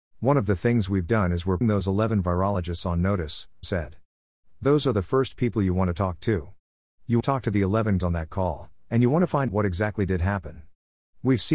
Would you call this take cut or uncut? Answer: cut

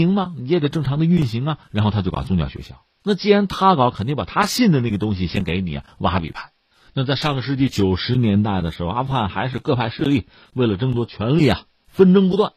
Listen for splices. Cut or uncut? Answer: uncut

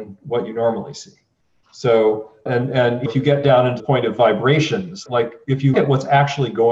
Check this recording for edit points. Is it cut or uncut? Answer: cut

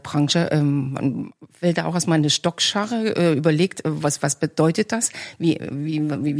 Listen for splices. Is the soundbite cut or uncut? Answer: uncut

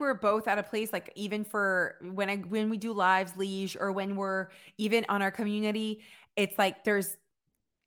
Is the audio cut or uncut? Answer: uncut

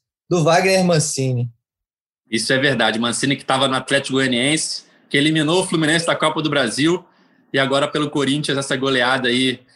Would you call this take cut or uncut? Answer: uncut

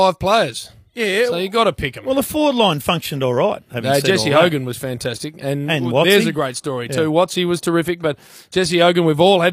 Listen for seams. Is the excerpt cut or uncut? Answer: uncut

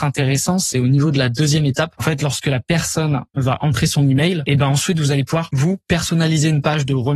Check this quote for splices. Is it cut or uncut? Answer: uncut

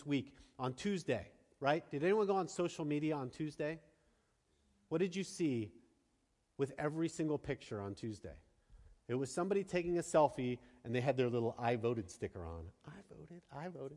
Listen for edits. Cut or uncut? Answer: uncut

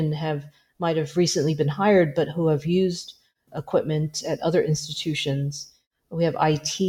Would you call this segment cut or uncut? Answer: uncut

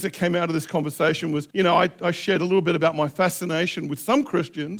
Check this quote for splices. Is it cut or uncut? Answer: cut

